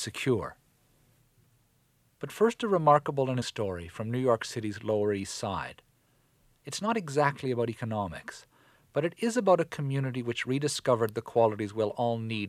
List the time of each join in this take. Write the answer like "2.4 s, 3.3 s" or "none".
3.4 s